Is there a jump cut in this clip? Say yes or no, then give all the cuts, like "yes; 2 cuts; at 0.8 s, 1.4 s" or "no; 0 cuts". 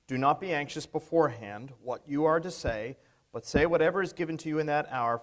no; 0 cuts